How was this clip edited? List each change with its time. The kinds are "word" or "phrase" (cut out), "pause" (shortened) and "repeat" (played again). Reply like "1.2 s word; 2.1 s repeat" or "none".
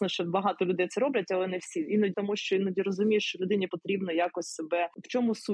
2.1 s phrase; 3.7 s word